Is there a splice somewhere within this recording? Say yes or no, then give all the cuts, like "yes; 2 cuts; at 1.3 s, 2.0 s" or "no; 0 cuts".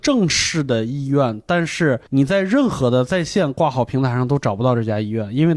yes; 1 cut; at 2.1 s